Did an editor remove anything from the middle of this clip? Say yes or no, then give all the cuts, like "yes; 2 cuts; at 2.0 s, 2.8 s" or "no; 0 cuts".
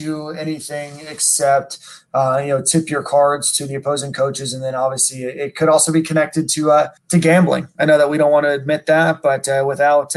yes; 1 cut; at 7.0 s